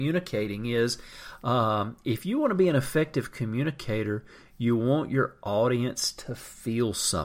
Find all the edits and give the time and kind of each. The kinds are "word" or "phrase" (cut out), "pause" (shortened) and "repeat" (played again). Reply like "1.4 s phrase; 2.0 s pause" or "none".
none